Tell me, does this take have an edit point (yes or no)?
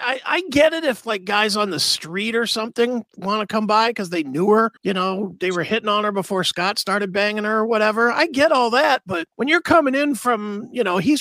yes